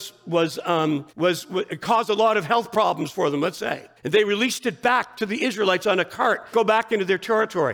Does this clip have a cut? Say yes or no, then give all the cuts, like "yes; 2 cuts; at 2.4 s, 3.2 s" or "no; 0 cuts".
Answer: yes; 3 cuts; at 1.1 s, 4.0 s, 6.5 s